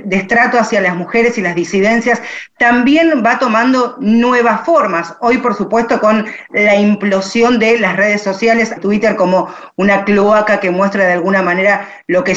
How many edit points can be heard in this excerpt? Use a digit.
1